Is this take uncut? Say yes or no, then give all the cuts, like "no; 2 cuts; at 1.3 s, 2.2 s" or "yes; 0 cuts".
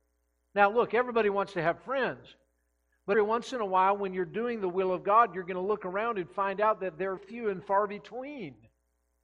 no; 2 cuts; at 3.1 s, 7.2 s